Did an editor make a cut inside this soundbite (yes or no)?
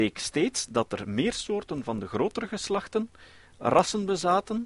no